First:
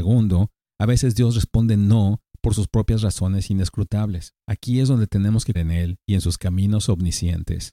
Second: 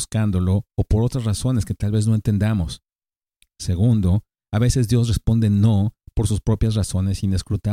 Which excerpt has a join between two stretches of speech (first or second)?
first